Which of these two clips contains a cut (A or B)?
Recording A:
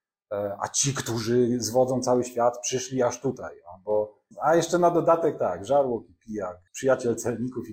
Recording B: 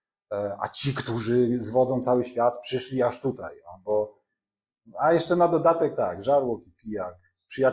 A